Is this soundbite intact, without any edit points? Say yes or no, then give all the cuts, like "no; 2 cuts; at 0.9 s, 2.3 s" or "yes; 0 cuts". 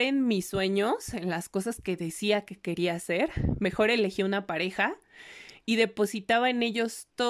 yes; 0 cuts